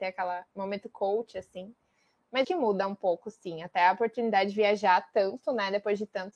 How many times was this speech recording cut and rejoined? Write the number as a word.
one